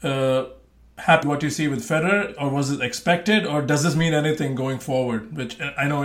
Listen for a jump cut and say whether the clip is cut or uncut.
cut